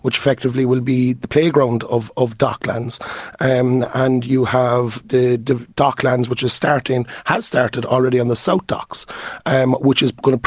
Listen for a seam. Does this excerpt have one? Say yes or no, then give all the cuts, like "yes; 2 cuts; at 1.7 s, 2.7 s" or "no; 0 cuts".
no; 0 cuts